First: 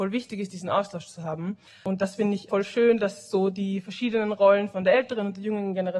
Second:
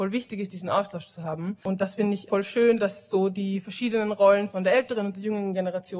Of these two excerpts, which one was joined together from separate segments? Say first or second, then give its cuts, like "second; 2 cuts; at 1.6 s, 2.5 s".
second; 1 cut; at 1.6 s